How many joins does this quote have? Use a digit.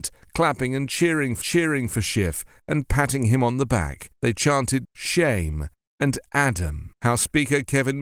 4